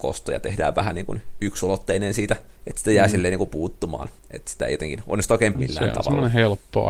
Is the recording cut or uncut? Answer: cut